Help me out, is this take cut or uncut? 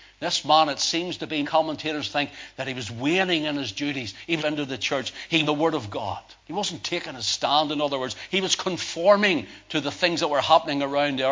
cut